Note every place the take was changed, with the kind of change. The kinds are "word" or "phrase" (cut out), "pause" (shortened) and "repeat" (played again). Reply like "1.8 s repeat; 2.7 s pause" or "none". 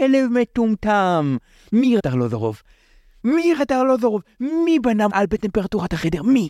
2.0 s word; 3.6 s word; 5.1 s word

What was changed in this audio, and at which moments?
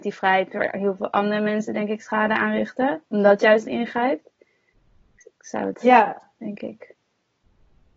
3.6 s word; 5.7 s word

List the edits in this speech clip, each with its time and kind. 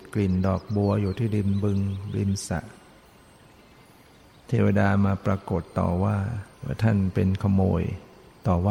6.5 s pause

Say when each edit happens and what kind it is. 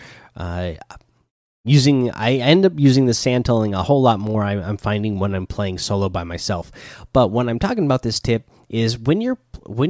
none

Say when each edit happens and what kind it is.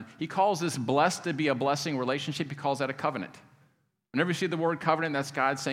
none

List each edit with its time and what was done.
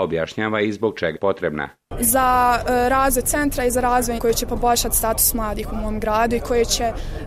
1.1 s word; 3.2 s word; 4.2 s word

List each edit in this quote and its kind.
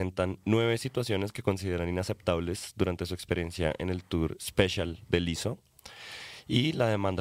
none

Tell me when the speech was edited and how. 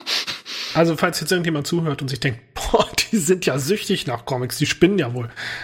none

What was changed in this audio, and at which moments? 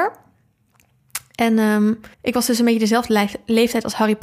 2.1 s pause

